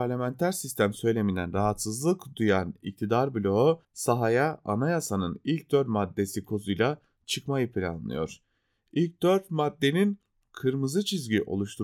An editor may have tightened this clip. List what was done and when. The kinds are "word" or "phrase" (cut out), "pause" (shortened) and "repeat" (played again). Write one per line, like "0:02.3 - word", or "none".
0:03.8 - pause